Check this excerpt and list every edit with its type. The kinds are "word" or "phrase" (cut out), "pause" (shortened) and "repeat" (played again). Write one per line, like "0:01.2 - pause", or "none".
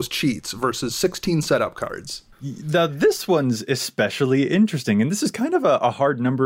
0:02.3 - pause